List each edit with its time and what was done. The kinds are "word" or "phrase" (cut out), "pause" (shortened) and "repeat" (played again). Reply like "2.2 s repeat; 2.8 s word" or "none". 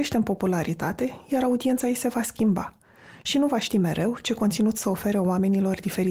none